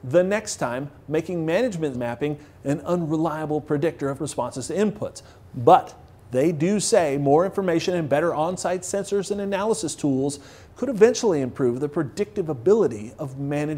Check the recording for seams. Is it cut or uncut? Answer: cut